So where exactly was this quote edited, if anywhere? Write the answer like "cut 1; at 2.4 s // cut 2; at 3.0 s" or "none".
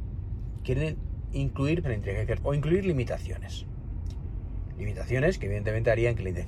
cut 1; at 1.8 s // cut 2; at 2.4 s